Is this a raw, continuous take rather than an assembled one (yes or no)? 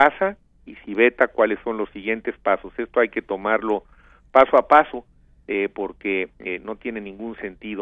yes